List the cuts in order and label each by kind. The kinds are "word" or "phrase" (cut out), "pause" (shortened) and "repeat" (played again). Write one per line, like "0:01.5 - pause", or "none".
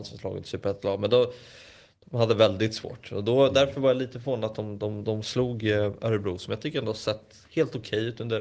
none